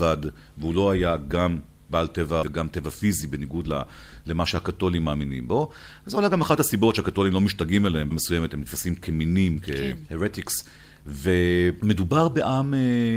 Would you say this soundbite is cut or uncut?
cut